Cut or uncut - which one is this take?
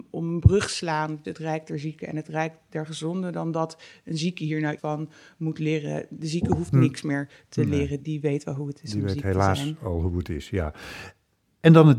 cut